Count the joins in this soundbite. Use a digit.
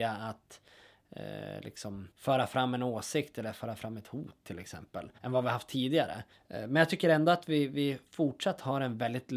3